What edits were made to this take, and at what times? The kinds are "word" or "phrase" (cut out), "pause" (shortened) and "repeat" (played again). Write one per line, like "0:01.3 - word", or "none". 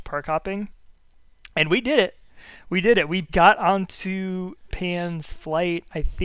0:03.3 - word
0:04.7 - word